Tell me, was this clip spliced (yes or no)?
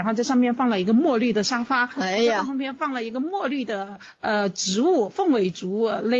no